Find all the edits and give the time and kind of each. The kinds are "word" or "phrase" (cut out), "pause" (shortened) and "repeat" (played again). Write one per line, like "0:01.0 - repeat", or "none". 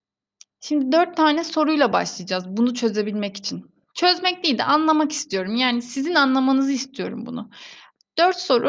none